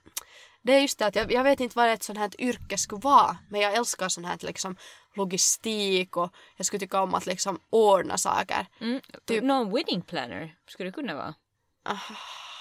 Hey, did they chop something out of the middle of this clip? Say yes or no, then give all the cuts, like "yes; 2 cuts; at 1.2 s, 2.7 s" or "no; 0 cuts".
no; 0 cuts